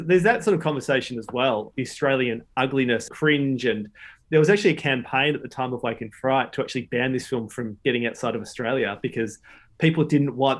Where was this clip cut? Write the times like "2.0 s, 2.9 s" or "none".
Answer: 1.7 s, 3.1 s